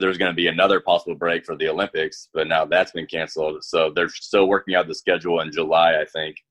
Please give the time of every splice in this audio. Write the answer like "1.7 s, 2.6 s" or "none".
none